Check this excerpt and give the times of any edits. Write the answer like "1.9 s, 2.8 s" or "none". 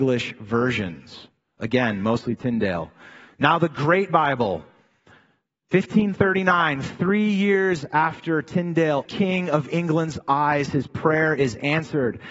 9.1 s